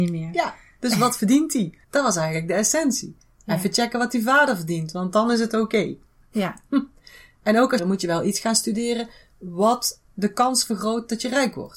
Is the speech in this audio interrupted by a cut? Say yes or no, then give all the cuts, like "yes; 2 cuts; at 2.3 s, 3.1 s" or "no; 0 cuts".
yes; 2 cuts; at 1.8 s, 7.8 s